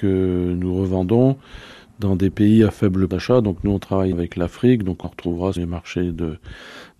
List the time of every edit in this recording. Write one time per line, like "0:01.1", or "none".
0:03.1
0:04.1
0:05.0
0:05.6